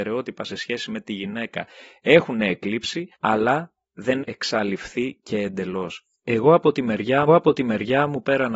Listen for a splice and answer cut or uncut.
cut